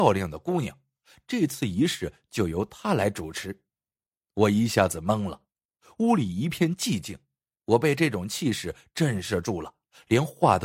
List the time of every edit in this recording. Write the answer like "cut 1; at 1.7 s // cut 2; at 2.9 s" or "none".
none